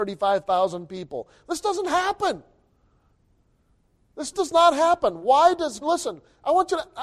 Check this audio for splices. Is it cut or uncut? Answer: cut